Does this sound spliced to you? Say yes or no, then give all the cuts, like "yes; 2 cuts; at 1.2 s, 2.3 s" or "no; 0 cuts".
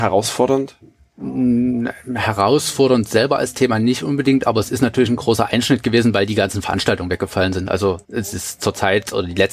yes; 2 cuts; at 1.0 s, 8.0 s